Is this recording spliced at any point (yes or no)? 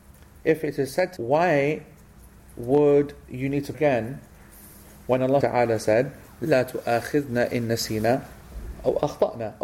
yes